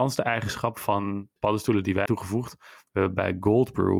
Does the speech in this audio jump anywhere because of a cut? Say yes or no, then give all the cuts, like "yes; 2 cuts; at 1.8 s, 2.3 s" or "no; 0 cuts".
yes; 2 cuts; at 1.4 s, 2.1 s